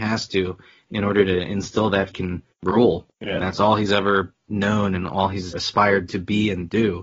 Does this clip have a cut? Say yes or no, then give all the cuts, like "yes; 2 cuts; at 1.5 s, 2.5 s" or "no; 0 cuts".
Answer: yes; 2 cuts; at 2.1 s, 5.5 s